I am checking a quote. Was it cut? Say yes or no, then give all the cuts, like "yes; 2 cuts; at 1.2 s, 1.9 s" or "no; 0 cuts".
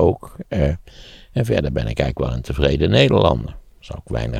no; 0 cuts